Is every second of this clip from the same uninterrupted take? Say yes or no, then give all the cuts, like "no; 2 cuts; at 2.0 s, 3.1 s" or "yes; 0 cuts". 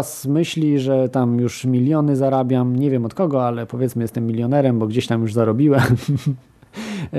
yes; 0 cuts